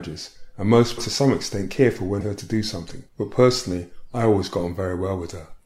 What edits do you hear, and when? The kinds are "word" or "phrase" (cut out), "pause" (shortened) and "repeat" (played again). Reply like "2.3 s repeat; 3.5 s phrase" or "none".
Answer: 1.0 s phrase; 2.2 s word; 3.1 s pause

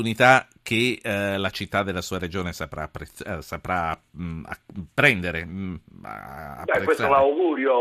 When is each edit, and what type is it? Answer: none

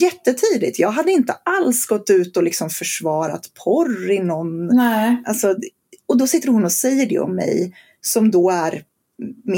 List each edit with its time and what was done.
none

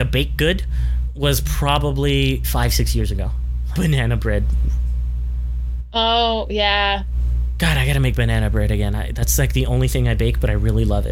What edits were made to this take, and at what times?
2.4 s word; 3.7 s word

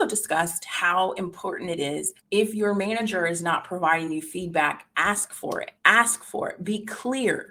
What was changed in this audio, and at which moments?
2.2 s pause; 5.8 s pause

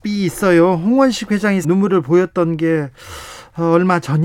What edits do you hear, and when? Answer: 1.6 s word

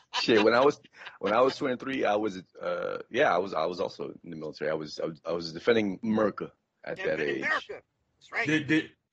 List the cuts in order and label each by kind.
none

